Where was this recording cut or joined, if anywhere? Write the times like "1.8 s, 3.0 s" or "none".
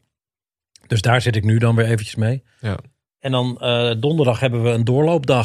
none